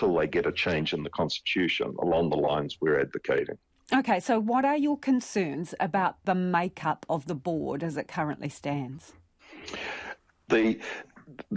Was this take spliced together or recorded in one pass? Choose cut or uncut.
uncut